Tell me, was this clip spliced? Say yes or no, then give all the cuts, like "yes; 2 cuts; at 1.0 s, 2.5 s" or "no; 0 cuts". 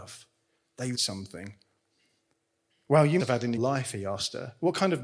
yes; 3 cuts; at 0.9 s, 3.2 s, 3.6 s